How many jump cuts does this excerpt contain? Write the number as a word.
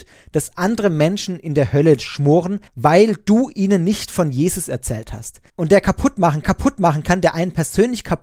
three